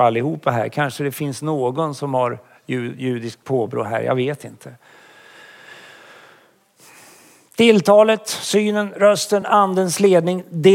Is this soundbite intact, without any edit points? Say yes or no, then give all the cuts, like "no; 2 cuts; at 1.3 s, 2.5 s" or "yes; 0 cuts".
yes; 0 cuts